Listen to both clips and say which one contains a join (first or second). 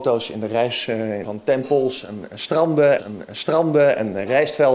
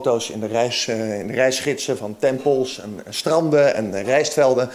first